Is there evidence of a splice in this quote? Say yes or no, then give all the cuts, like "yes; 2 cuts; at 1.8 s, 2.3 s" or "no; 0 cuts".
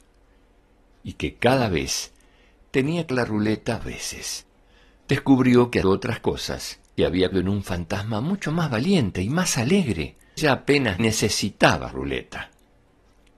yes; 8 cuts; at 3.1 s, 3.8 s, 5.8 s, 7.0 s, 7.3 s, 10.4 s, 11.0 s, 11.9 s